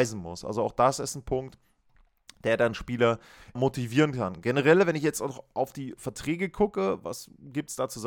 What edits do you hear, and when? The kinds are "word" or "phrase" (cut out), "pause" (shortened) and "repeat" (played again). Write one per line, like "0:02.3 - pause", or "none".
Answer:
0:03.5 - word